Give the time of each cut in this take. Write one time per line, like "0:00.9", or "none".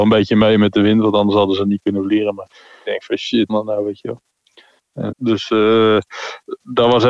0:03.5
0:05.1